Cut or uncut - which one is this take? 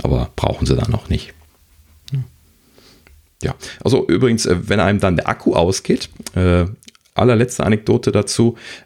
uncut